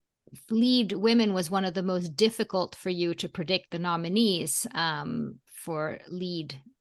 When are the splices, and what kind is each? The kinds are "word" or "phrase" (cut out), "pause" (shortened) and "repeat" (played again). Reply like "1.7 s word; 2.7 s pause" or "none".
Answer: none